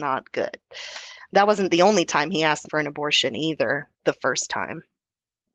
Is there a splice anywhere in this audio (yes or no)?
yes